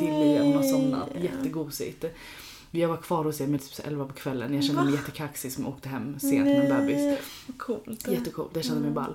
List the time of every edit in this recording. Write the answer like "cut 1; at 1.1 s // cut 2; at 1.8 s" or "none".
cut 1; at 3.6 s

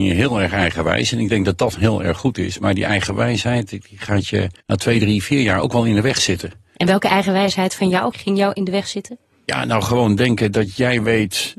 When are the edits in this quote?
cut 1; at 4.6 s

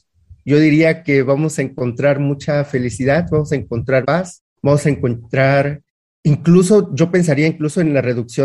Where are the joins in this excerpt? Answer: cut 1; at 4.0 s // cut 2; at 4.5 s

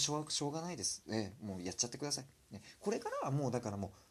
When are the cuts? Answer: none

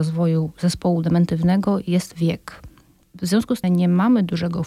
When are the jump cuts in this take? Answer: cut 1; at 3.6 s

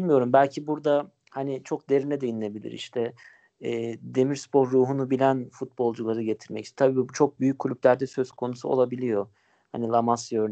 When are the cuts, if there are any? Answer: none

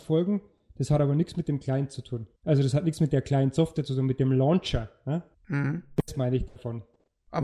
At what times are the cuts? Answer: cut 1; at 2.4 s // cut 2; at 5.3 s

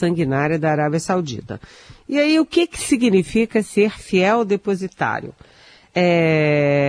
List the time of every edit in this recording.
none

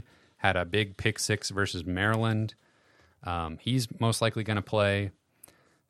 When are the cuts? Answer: none

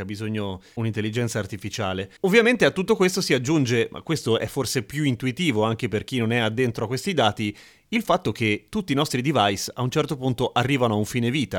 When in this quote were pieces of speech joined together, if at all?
none

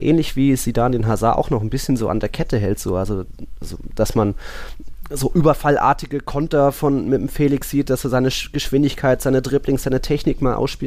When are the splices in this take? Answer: none

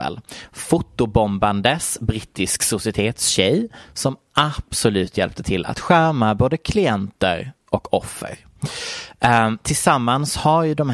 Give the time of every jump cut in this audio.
none

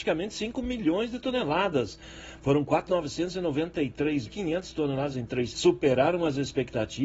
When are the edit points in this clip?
cut 1; at 2.9 s // cut 2; at 4.3 s // cut 3; at 5.1 s // cut 4; at 5.5 s

